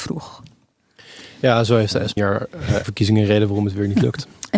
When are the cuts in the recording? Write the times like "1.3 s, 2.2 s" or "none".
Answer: 2.2 s, 2.8 s